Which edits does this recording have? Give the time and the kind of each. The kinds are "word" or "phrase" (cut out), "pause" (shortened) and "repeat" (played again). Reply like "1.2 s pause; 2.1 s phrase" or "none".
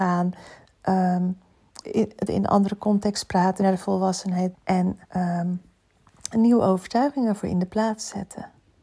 1.8 s word; 2.3 s word; 3.6 s word; 4.5 s word; 5.0 s pause